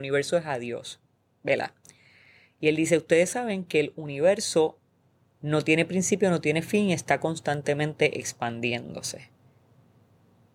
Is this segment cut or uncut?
uncut